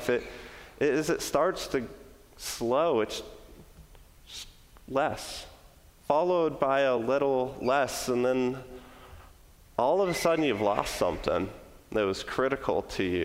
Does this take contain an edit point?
no; 0 cuts

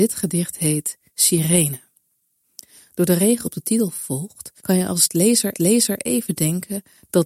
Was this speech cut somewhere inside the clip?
yes; 4 cuts; at 1.1 s, 3.4 s, 4.6 s, 5.5 s

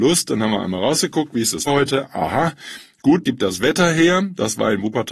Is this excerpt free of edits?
no; 2 cuts; at 1.7 s, 3.2 s

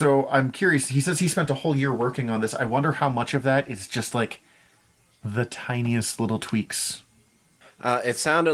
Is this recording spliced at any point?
no; 0 cuts

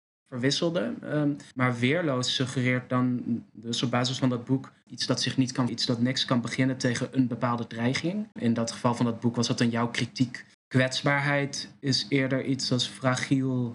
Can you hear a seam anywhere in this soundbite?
yes; 4 cuts; at 1.5 s, 5.7 s, 8.3 s, 10.5 s

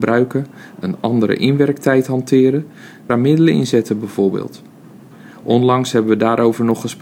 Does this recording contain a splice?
yes; 1 cut; at 3.1 s

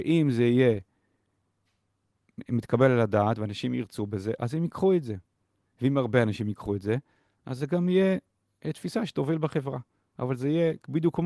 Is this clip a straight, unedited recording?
yes; 0 cuts

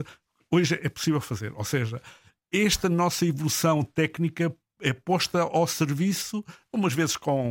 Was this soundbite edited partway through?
no; 0 cuts

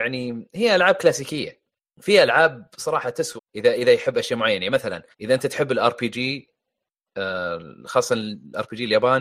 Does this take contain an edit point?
yes; 3 cuts; at 1.8 s, 3.4 s, 5.1 s

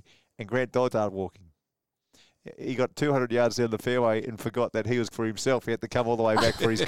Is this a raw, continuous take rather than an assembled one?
no; 2 cuts; at 0.9 s, 5.1 s

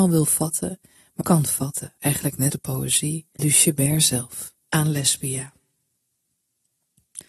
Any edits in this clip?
yes; 5 cuts; at 1.2 s, 2.0 s, 2.5 s, 3.4 s, 4.6 s

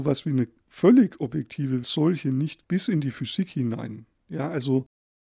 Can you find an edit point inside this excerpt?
yes; 2 cuts; at 1.8 s, 2.6 s

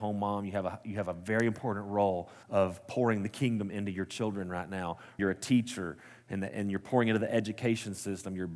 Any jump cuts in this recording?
yes; 2 cuts; at 2.4 s, 5.2 s

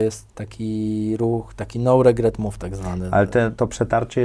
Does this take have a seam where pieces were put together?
no; 0 cuts

